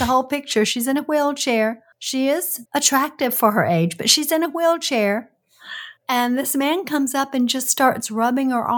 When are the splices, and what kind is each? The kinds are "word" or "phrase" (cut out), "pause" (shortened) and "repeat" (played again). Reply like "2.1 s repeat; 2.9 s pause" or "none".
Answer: 1.9 s pause; 2.7 s pause; 6.0 s pause